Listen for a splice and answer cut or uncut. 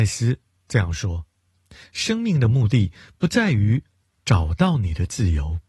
uncut